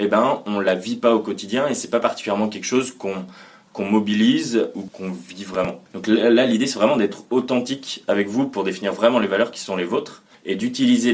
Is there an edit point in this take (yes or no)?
no